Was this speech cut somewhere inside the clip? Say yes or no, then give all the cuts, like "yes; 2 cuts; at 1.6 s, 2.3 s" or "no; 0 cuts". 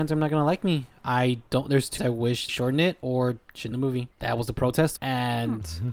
yes; 5 cuts; at 2.0 s, 2.5 s, 3.7 s, 4.1 s, 5.0 s